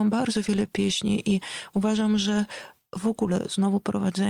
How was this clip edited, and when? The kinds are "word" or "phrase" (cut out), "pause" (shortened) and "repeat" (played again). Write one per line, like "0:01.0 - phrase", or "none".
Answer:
none